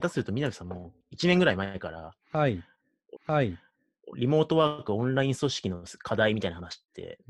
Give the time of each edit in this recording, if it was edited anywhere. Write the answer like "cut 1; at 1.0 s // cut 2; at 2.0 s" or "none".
cut 1; at 1.0 s // cut 2; at 3.2 s